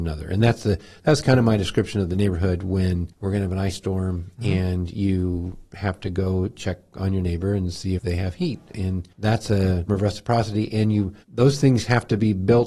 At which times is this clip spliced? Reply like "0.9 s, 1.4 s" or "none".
3.1 s, 8.0 s, 9.1 s, 9.9 s, 11.2 s